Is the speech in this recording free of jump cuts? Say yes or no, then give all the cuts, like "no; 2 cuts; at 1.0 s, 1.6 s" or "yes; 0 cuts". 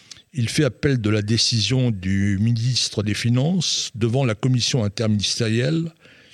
yes; 0 cuts